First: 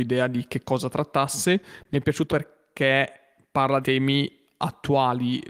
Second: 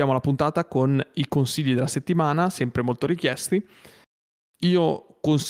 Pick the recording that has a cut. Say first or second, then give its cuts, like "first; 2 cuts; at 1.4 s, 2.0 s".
first; 2 cuts; at 2.3 s, 3.8 s